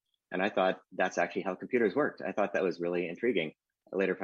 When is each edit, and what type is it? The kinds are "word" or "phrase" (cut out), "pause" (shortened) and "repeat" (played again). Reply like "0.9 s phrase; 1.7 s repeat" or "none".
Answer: none